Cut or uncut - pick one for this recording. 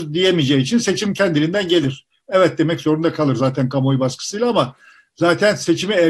uncut